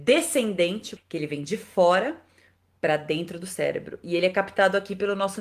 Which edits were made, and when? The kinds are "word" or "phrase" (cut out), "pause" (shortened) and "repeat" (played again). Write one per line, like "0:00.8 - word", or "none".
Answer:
0:01.0 - phrase